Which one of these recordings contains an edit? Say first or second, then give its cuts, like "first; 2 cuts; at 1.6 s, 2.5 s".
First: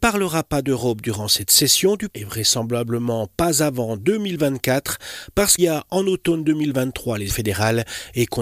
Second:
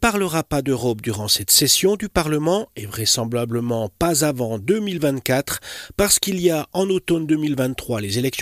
first; 3 cuts; at 2.1 s, 5.6 s, 7.3 s